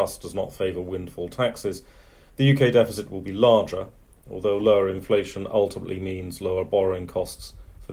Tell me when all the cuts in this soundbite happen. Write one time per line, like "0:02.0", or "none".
none